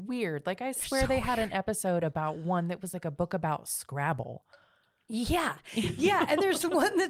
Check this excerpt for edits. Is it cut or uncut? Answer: uncut